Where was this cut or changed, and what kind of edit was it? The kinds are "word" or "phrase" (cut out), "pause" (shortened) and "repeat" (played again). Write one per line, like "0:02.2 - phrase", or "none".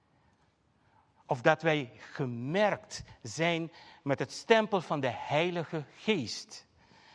none